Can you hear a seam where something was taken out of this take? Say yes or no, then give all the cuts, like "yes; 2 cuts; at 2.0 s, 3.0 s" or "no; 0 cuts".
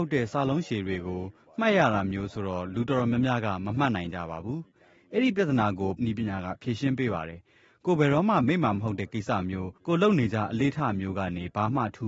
yes; 2 cuts; at 6.0 s, 9.8 s